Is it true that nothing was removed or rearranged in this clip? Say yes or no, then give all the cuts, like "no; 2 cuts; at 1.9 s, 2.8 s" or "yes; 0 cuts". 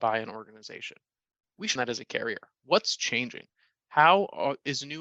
no; 1 cut; at 1.8 s